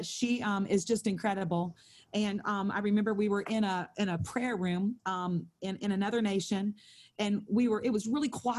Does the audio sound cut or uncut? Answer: cut